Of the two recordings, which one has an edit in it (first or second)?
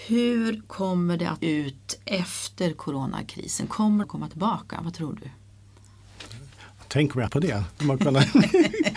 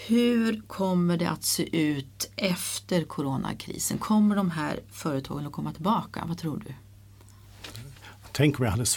first